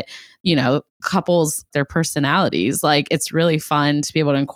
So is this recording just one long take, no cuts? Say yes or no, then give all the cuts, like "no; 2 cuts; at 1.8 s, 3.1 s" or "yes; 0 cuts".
no; 1 cut; at 1.7 s